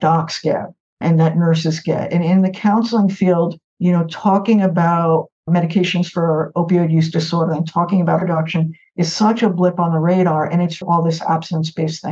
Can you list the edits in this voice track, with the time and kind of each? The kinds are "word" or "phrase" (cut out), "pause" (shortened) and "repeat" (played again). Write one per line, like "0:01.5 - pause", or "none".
0:03.7 - pause
0:05.4 - pause
0:08.2 - word
0:10.8 - word